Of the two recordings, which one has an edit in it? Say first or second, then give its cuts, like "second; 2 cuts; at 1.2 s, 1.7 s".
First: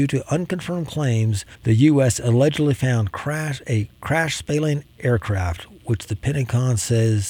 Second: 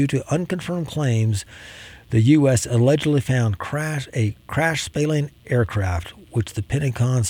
first; 1 cut; at 1.5 s